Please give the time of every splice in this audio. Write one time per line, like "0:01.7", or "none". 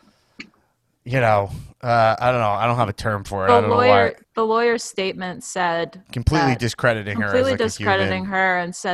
0:04.2